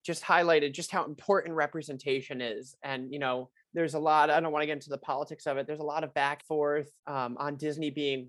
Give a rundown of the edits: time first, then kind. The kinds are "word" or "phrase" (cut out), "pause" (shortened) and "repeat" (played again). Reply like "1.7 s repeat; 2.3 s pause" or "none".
3.6 s pause; 6.4 s word; 7.0 s pause